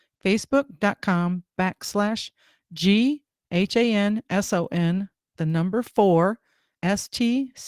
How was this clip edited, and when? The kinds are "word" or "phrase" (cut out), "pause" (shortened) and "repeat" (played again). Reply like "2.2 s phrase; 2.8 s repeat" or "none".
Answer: none